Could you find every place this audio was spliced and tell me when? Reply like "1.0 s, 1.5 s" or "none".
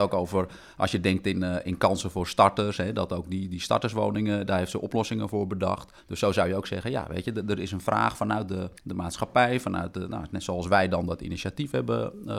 6.0 s, 8.8 s

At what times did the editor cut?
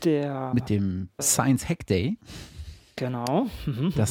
1.2 s

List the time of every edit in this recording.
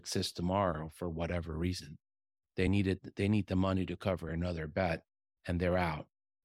none

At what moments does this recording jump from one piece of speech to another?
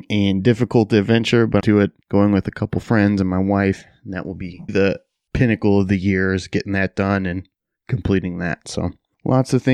1.6 s, 2.0 s, 4.7 s

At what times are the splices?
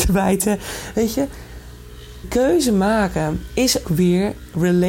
2.2 s, 3.8 s

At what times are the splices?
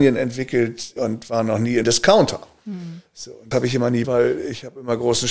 1.0 s, 1.8 s, 3.5 s, 4.0 s

